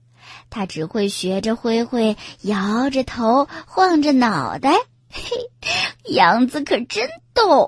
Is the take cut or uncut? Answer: uncut